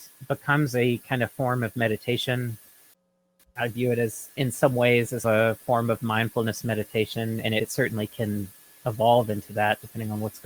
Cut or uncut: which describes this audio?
uncut